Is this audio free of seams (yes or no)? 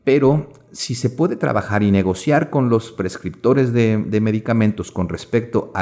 yes